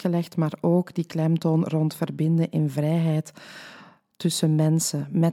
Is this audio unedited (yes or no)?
yes